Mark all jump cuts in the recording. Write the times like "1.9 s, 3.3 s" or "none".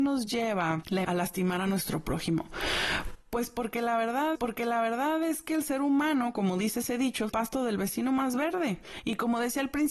1.0 s, 4.3 s, 7.3 s

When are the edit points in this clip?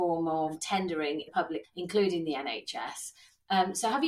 1.3 s, 1.6 s

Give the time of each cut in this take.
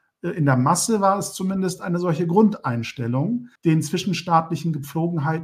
3.6 s

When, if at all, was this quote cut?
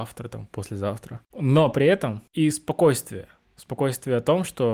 2.3 s

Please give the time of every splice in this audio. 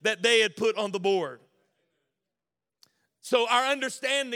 none

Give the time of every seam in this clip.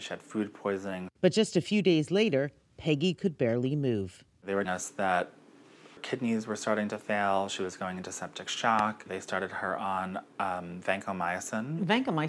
4.6 s, 6.0 s

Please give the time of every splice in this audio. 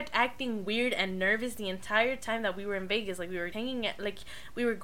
3.5 s

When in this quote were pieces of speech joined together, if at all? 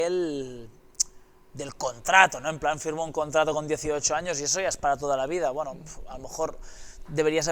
none

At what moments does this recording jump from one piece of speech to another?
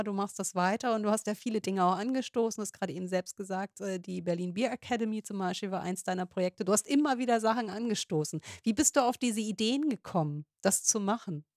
none

